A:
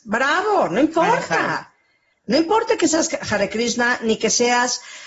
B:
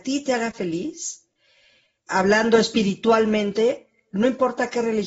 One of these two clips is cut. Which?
B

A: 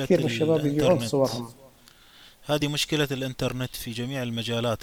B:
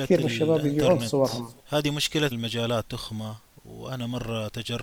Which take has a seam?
B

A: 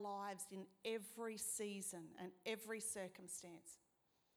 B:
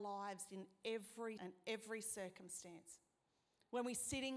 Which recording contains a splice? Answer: B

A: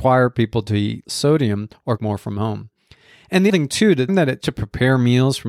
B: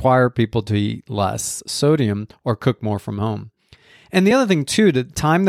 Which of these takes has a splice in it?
A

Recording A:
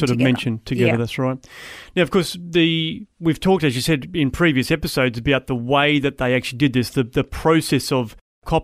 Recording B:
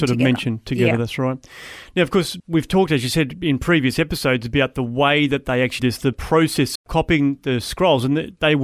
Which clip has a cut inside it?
B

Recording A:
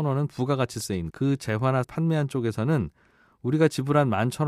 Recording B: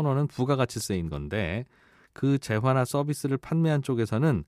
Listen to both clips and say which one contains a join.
A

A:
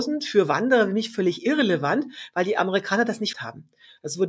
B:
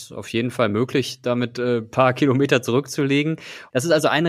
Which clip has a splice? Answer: A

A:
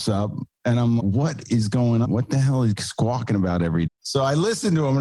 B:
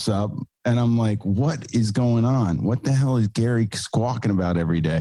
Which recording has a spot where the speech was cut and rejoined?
A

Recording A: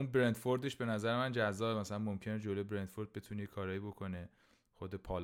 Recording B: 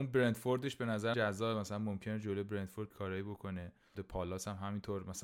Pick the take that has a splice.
B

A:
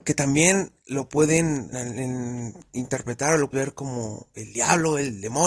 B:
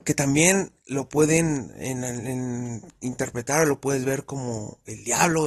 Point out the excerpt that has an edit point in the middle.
A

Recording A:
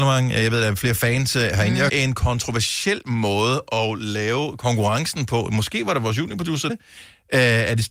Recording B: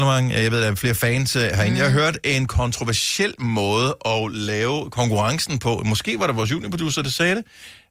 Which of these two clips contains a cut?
A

